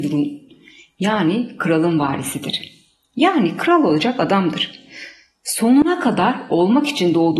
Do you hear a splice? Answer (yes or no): no